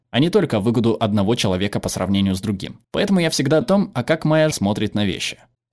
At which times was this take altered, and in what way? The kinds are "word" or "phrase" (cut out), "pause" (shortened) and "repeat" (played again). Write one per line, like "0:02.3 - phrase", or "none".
0:02.8 - pause
0:03.6 - word
0:04.5 - word